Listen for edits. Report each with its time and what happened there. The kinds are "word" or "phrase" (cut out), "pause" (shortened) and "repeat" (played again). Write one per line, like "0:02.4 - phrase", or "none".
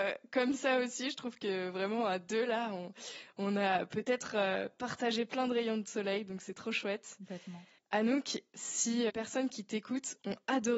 0:07.8 - pause
0:09.1 - phrase